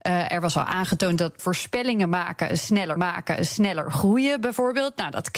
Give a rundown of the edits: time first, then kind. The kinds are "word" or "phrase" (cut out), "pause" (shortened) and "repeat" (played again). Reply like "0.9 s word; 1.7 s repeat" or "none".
1.4 s phrase; 3.0 s repeat

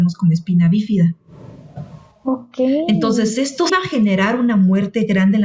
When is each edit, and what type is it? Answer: 3.7 s word

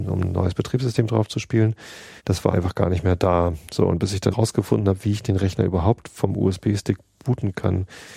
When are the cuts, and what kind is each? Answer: 2.2 s pause; 2.5 s word; 4.3 s word

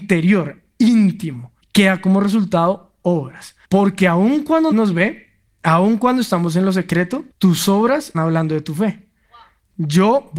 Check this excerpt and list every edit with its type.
1.6 s pause; 3.6 s pause; 4.7 s word; 5.5 s pause; 7.3 s pause; 8.1 s word

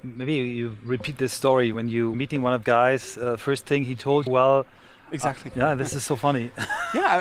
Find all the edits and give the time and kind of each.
1.7 s word; 2.1 s word; 2.6 s word; 4.3 s word

